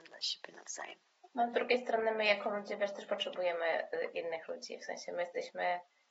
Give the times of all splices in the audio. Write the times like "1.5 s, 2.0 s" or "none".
none